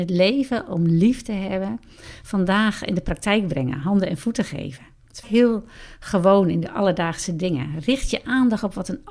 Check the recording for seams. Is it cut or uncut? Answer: cut